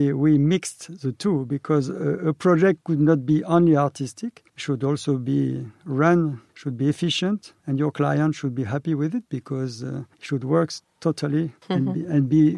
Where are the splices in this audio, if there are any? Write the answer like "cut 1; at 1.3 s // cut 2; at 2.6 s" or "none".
cut 1; at 4.5 s // cut 2; at 6.5 s // cut 3; at 7.6 s // cut 4; at 10.1 s // cut 5; at 11.6 s

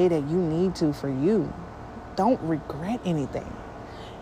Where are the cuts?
none

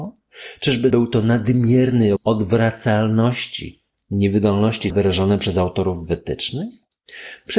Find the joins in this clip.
cut 1; at 0.9 s // cut 2; at 2.2 s // cut 3; at 4.9 s

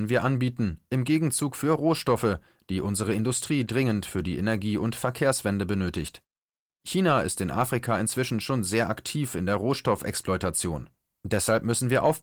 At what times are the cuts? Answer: none

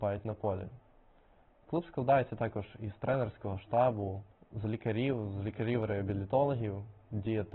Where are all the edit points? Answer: cut 1; at 4.3 s

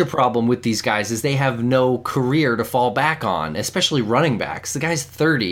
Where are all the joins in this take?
none

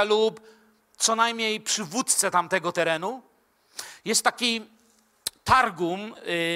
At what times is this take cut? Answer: none

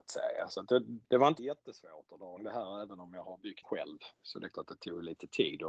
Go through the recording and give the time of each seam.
cut 1; at 1.0 s // cut 2; at 1.4 s // cut 3; at 2.4 s // cut 4; at 3.6 s // cut 5; at 4.1 s // cut 6; at 4.5 s

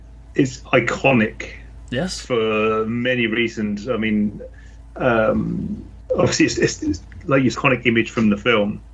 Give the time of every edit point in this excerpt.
cut 1; at 6.8 s // cut 2; at 7.5 s

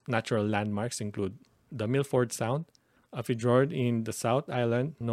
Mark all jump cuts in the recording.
none

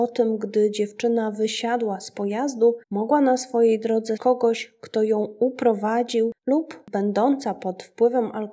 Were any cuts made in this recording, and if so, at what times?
cut 1; at 2.8 s // cut 2; at 4.2 s // cut 3; at 6.4 s

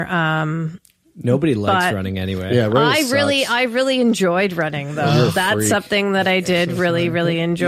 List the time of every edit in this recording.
none

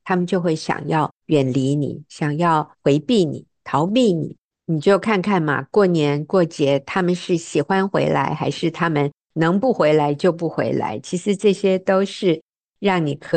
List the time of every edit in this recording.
cut 1; at 1.2 s // cut 2; at 2.7 s // cut 3; at 4.5 s

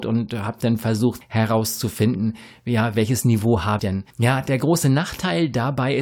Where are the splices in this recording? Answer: cut 1; at 1.2 s // cut 2; at 3.8 s // cut 3; at 4.1 s

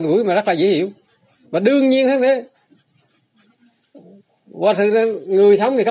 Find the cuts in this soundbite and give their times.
none

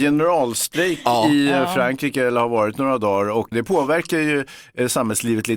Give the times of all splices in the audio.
cut 1; at 3.5 s

